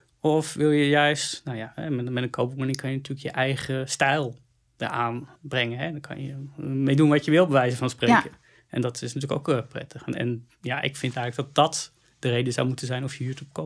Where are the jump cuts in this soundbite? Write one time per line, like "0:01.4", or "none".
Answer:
0:05.4

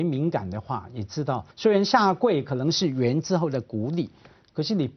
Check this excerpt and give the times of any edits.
0:01.5

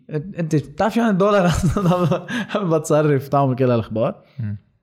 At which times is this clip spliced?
none

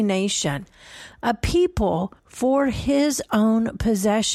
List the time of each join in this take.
0:02.2

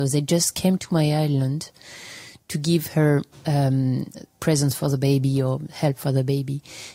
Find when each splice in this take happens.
0:04.4

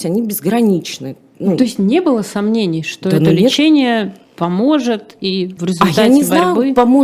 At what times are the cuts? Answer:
0:05.6

